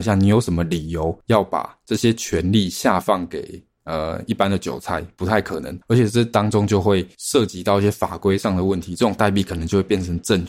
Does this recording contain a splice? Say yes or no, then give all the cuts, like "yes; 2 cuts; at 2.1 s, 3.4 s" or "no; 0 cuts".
yes; 1 cut; at 5.8 s